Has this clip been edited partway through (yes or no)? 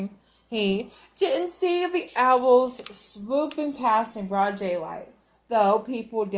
no